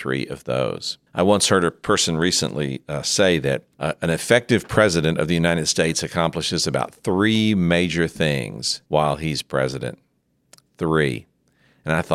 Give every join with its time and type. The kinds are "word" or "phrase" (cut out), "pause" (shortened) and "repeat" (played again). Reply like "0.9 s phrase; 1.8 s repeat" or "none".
1.1 s pause; 3.7 s pause; 8.9 s pause